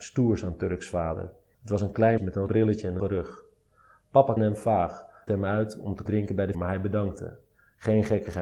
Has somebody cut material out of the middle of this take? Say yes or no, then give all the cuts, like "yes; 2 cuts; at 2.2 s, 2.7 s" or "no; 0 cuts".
yes; 7 cuts; at 2.2 s, 2.5 s, 3.0 s, 4.4 s, 5.3 s, 6.1 s, 6.5 s